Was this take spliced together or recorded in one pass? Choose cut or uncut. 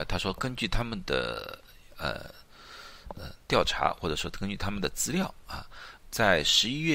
cut